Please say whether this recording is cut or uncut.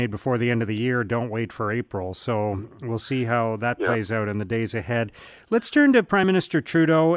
uncut